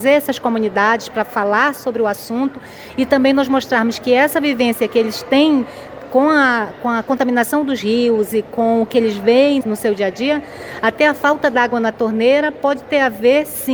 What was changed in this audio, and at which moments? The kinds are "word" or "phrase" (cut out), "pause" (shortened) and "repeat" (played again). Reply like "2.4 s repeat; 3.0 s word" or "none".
9.6 s word